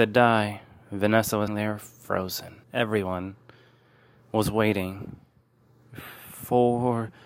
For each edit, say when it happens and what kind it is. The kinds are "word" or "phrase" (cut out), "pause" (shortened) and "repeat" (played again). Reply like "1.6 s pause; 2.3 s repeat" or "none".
1.5 s word; 2.6 s pause